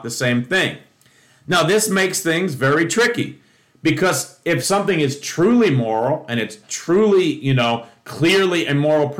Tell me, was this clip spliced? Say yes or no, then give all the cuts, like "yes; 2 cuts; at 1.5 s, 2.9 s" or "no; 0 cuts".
no; 0 cuts